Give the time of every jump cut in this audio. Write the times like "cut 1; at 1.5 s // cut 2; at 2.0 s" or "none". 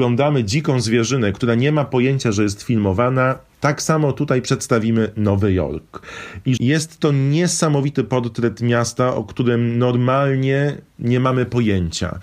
cut 1; at 6.6 s